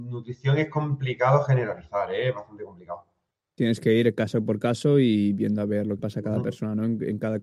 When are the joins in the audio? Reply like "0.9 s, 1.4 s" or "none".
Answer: 3.3 s, 6.0 s